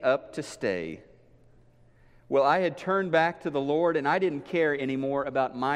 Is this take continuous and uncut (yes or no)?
yes